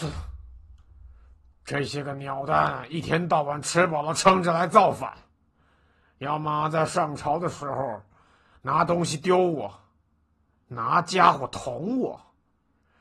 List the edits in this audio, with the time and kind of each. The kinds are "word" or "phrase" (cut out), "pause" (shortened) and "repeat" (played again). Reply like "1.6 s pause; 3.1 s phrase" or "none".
none